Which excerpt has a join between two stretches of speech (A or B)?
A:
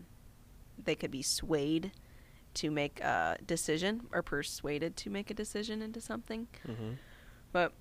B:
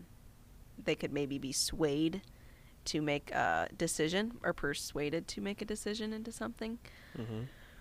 A